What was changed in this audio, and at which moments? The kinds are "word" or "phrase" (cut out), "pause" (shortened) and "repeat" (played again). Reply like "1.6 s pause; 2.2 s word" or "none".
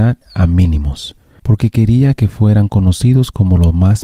none